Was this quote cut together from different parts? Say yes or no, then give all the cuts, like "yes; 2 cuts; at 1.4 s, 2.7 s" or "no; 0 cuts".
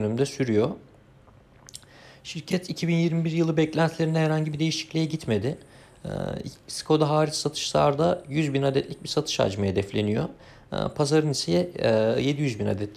no; 0 cuts